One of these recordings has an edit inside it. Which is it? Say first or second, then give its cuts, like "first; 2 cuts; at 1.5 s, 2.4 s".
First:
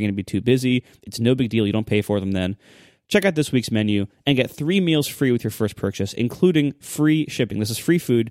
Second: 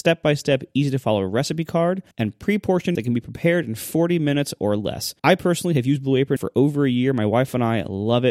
second; 4 cuts; at 2.1 s, 2.9 s, 5.2 s, 6.4 s